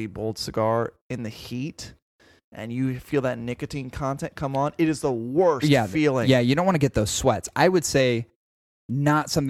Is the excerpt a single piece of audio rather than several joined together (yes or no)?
yes